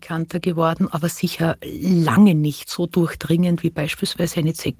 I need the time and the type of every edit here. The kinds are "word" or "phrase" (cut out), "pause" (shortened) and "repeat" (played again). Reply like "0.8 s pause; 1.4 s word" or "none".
none